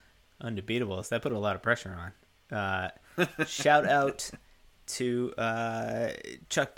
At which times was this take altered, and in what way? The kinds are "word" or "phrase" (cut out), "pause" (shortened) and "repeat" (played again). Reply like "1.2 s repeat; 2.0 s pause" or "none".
none